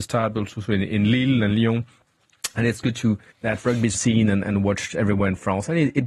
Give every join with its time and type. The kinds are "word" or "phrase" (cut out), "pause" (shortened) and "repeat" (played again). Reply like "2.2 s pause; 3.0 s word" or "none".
3.3 s word; 3.9 s word